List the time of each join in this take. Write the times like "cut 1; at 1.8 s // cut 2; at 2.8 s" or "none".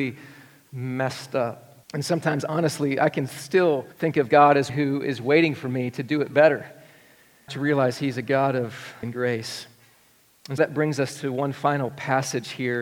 cut 1; at 1.8 s // cut 2; at 3.9 s // cut 3; at 4.7 s // cut 4; at 7.5 s // cut 5; at 9.0 s // cut 6; at 10.6 s